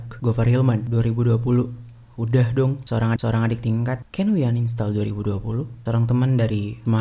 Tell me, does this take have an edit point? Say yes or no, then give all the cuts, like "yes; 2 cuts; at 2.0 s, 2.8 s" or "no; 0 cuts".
yes; 1 cut; at 3.2 s